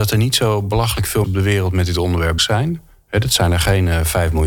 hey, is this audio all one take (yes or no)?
no